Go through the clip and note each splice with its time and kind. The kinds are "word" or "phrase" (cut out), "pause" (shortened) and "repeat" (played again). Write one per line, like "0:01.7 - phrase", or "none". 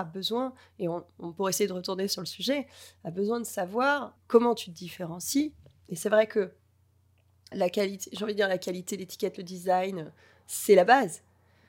0:04.2 - word
0:07.5 - word